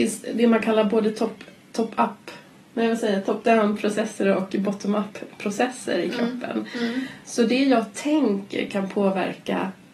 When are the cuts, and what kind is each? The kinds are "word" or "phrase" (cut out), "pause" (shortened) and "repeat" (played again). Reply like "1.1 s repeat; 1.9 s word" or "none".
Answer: none

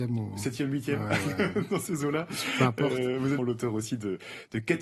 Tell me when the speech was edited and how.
3.4 s word

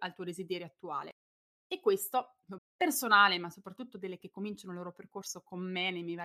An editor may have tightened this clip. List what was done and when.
2.6 s phrase; 4.2 s word

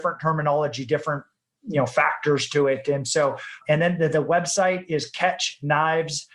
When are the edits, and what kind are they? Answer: none

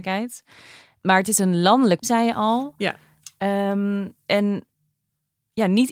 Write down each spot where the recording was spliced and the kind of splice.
2.0 s word

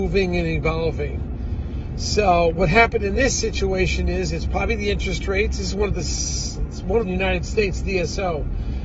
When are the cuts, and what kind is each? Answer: 7.0 s phrase

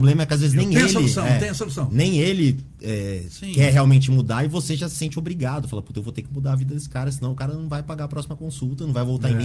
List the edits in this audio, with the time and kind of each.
none

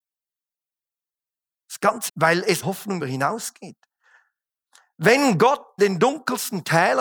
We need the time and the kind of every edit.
2.1 s word; 2.6 s word; 3.0 s word; 5.8 s word

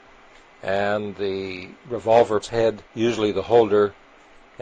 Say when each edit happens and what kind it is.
2.4 s phrase; 2.9 s pause

